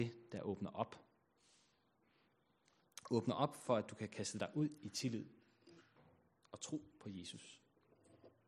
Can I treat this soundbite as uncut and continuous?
yes; 0 cuts

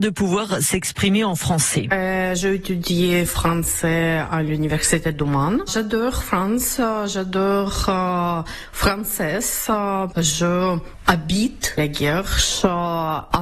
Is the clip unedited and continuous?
yes; 0 cuts

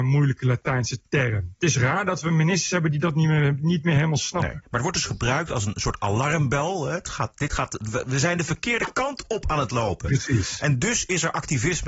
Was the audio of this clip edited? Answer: no; 0 cuts

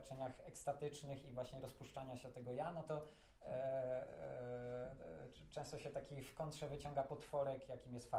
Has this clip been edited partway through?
no; 0 cuts

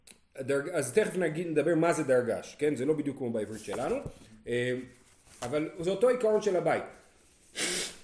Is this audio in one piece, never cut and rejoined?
yes; 0 cuts

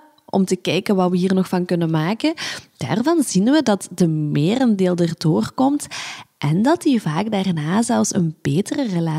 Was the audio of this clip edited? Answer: no; 0 cuts

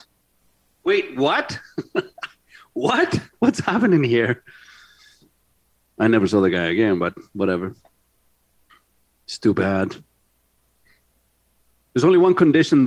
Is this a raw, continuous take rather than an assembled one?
no; 1 cut; at 3.3 s

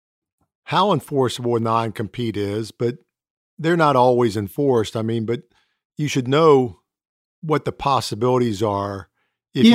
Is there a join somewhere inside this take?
no; 0 cuts

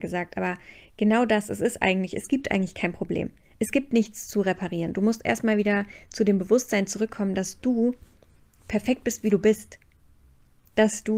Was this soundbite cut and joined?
no; 0 cuts

